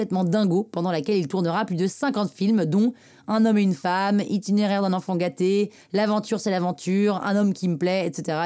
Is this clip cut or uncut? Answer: uncut